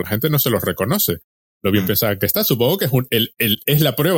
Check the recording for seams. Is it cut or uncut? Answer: uncut